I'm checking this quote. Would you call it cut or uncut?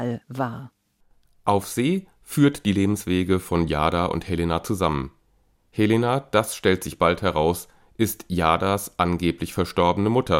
uncut